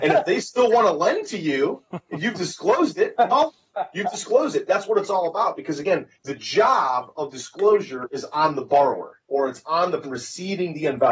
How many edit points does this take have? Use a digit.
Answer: 3